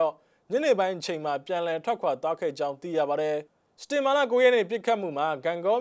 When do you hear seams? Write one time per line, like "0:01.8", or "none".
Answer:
0:03.5

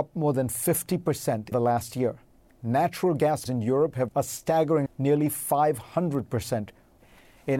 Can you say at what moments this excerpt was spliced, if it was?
0:01.5
0:03.5
0:04.1
0:04.9

